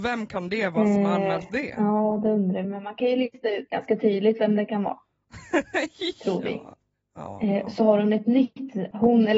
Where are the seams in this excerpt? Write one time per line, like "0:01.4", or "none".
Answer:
0:02.6
0:07.8